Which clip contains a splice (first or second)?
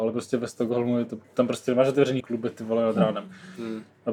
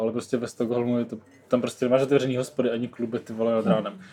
first